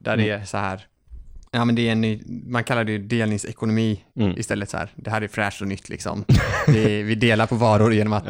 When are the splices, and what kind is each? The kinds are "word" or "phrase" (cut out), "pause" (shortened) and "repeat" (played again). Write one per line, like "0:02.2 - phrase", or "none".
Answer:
0:01.5 - pause